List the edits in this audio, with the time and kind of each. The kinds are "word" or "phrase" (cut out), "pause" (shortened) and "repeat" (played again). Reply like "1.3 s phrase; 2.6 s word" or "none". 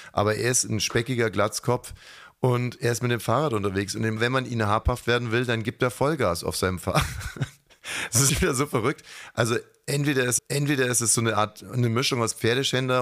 4.2 s phrase; 8.3 s word; 10.4 s repeat